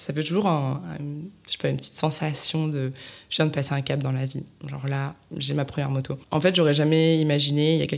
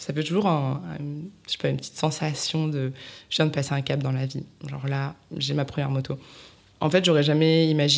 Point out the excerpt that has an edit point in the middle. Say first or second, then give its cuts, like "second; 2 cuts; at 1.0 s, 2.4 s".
first; 1 cut; at 6.2 s